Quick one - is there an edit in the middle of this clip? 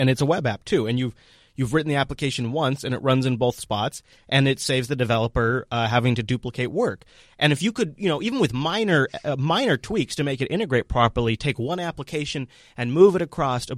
no; 0 cuts

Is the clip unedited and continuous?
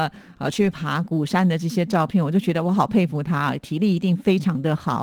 yes; 0 cuts

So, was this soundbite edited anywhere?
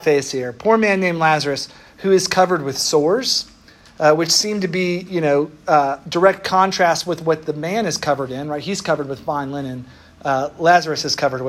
no; 0 cuts

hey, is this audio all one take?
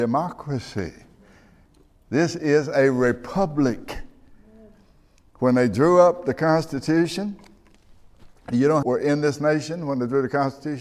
no; 1 cut; at 8.8 s

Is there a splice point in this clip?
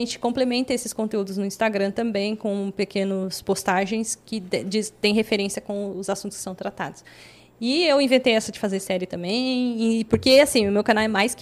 no; 0 cuts

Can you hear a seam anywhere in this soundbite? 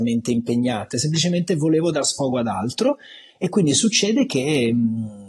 no; 0 cuts

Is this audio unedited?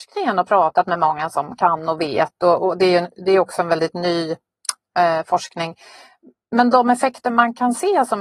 yes; 0 cuts

